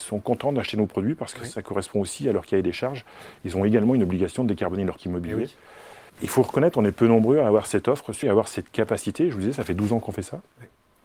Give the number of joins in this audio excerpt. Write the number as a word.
three